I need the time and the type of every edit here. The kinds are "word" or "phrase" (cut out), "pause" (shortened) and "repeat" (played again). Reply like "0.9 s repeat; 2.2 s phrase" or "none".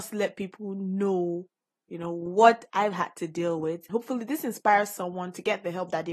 3.9 s word